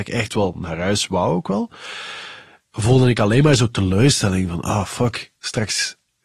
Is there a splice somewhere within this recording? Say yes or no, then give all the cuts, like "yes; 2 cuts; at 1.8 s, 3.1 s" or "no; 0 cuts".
no; 0 cuts